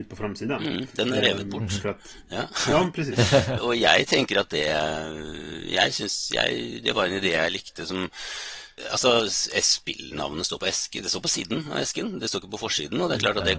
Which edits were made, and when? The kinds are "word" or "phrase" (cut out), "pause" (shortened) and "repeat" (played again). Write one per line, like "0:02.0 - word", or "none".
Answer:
0:03.6 - word